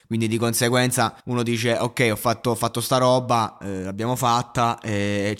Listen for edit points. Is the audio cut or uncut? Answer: cut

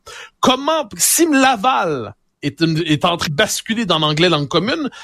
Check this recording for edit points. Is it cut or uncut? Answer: cut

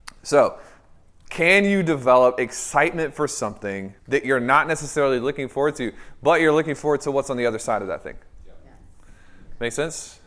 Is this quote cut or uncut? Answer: cut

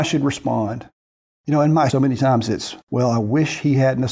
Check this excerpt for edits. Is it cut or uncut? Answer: cut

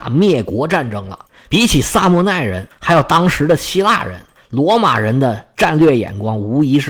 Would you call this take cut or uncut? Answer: uncut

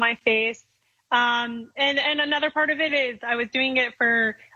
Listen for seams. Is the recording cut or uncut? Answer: uncut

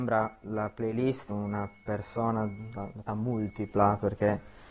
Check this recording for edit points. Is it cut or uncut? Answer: cut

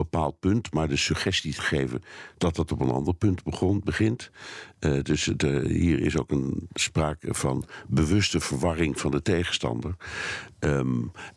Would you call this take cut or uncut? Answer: uncut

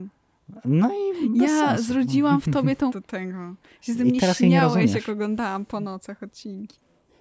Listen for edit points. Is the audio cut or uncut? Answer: cut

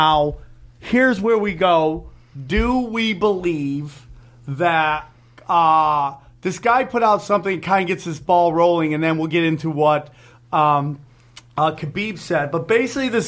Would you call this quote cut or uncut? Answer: uncut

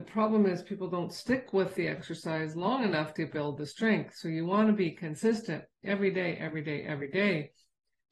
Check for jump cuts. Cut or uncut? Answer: uncut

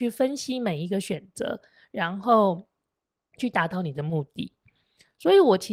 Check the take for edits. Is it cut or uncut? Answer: cut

